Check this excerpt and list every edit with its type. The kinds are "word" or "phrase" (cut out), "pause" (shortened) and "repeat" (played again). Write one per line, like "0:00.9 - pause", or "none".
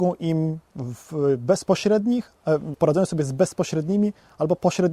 0:02.7 - word